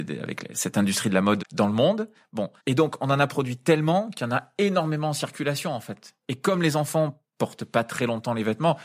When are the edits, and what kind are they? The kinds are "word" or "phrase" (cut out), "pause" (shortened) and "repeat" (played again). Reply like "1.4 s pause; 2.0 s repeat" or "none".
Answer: 1.4 s word; 2.6 s pause